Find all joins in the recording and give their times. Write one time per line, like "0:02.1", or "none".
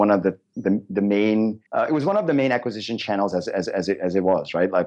0:01.7
0:03.7